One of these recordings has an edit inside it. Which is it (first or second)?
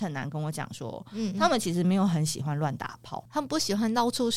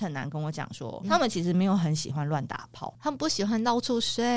second